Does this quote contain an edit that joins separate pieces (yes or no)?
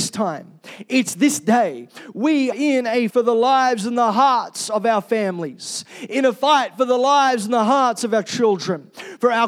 yes